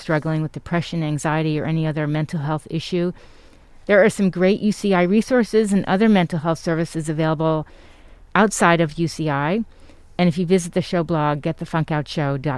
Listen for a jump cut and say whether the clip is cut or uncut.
uncut